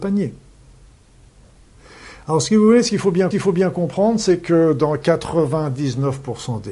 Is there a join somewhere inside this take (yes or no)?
yes